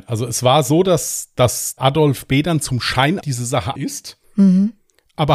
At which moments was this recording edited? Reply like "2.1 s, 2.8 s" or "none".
1.8 s, 3.2 s, 3.8 s, 4.2 s